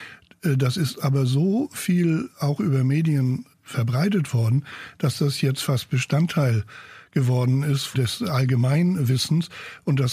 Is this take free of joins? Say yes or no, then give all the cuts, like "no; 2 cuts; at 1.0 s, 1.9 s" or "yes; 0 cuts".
yes; 0 cuts